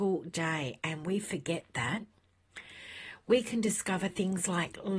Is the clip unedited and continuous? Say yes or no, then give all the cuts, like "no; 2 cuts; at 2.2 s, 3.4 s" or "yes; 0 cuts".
yes; 0 cuts